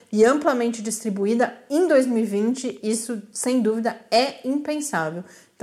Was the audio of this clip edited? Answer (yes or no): no